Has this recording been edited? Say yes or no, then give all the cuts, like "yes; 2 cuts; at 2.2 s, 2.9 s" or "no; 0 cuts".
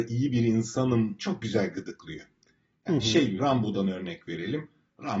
yes; 2 cuts; at 1.2 s, 3.4 s